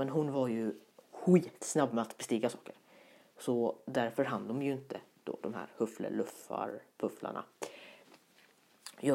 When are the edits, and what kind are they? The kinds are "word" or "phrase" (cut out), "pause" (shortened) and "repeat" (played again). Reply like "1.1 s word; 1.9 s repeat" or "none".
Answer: none